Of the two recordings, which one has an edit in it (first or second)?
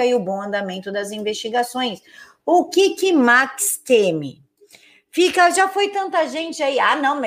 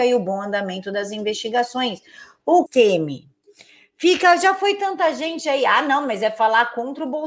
second